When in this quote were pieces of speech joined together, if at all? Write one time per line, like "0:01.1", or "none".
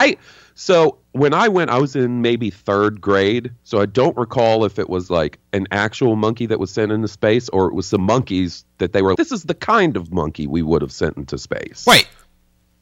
0:03.6
0:09.2